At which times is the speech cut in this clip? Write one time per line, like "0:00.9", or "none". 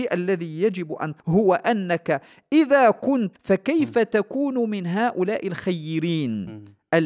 0:01.2
0:03.3